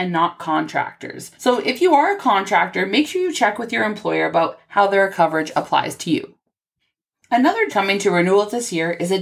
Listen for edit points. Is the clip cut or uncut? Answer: cut